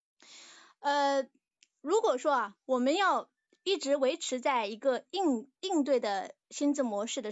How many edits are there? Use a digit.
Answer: 1